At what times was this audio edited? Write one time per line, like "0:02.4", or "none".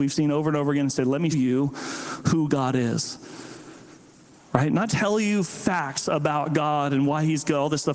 0:01.3
0:04.9